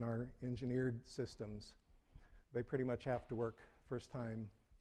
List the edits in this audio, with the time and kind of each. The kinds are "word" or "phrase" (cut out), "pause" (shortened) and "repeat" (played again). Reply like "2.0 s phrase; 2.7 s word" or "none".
2.4 s pause